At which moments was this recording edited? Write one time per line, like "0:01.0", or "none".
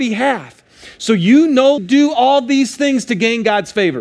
0:01.8